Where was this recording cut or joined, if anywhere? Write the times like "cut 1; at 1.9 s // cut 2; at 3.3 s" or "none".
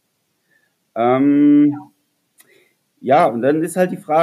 none